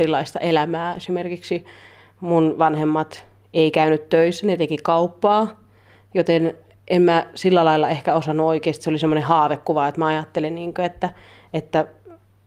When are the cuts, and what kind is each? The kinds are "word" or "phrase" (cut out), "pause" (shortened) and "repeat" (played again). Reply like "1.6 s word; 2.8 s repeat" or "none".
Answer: none